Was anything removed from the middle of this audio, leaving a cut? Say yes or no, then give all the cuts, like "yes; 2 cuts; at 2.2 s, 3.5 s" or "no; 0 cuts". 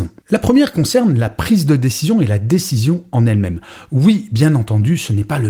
no; 0 cuts